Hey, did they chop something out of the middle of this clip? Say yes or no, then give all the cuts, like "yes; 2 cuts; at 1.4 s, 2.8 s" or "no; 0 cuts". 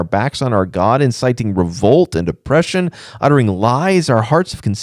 no; 0 cuts